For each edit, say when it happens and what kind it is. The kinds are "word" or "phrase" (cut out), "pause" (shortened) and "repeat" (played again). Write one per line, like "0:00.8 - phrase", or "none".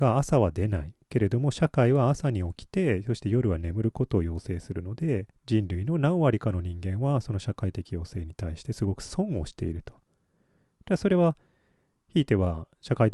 0:05.4 - pause